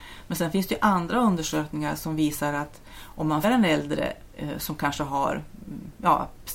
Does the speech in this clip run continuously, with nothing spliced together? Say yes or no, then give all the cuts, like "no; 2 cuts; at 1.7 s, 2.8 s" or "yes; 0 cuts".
no; 1 cut; at 3.4 s